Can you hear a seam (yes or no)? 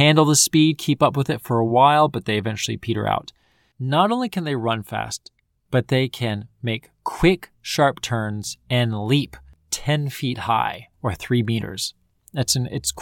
no